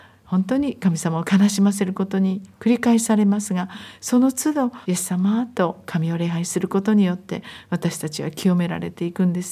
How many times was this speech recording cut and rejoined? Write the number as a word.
one